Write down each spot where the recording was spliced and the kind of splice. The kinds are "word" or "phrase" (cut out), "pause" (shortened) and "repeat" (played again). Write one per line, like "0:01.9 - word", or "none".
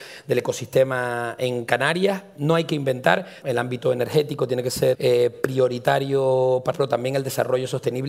0:03.4 - phrase
0:04.9 - word
0:06.7 - word